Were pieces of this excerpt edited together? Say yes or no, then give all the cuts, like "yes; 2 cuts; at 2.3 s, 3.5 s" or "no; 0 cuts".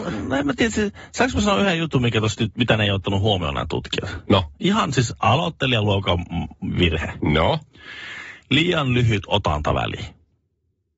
no; 0 cuts